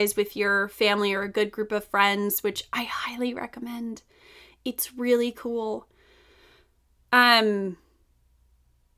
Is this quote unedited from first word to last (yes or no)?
yes